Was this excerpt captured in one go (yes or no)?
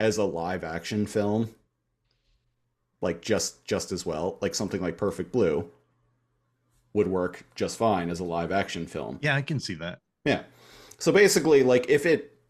yes